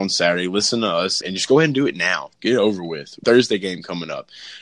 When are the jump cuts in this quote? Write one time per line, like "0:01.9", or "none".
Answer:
0:01.2
0:02.4
0:03.2

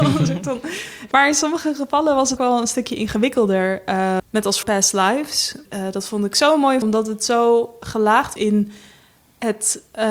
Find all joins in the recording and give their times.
0:01.1
0:02.4
0:04.2
0:04.6
0:05.7
0:06.8
0:08.4

